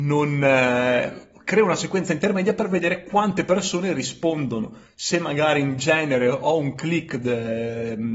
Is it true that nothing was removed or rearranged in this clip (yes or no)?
yes